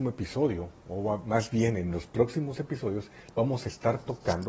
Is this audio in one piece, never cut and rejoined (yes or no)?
yes